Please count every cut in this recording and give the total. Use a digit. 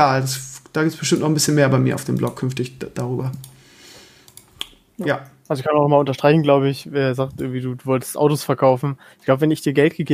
0